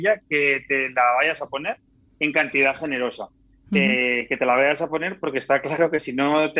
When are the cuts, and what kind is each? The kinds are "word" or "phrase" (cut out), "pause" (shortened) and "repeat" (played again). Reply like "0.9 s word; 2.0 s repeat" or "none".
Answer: none